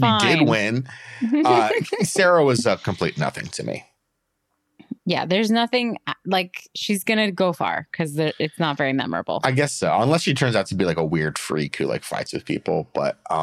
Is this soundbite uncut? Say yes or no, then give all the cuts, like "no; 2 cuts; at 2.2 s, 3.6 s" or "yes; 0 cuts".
no; 1 cut; at 5.0 s